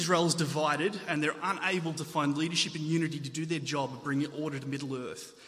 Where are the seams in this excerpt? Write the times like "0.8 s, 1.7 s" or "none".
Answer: none

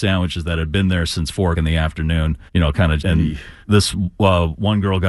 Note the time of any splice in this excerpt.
1.5 s, 2.5 s, 3.0 s, 3.6 s

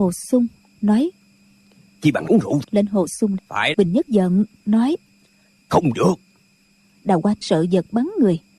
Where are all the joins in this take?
2.3 s, 2.6 s, 3.4 s, 3.7 s, 4.1 s, 5.9 s, 7.4 s

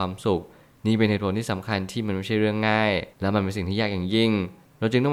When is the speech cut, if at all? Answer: 3.1 s

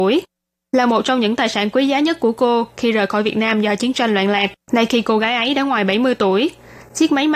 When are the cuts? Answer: 4.6 s

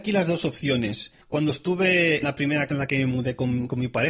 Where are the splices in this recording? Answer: 1.2 s, 2.2 s, 2.7 s

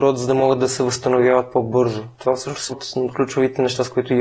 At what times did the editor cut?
2.7 s

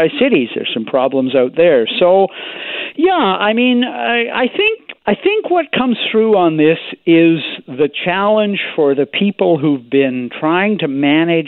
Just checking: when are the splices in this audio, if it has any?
5.0 s

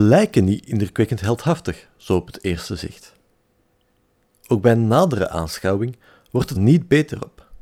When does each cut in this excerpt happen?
6.6 s

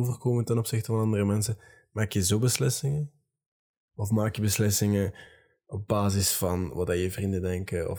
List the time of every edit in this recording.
none

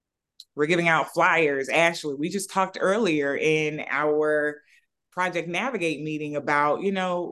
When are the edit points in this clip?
none

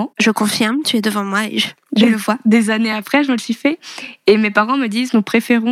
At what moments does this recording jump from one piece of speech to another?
none

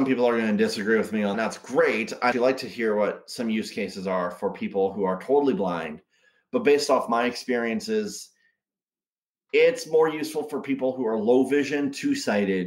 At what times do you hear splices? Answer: 1.3 s, 2.3 s

